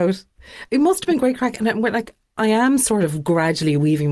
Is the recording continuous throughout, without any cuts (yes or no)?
yes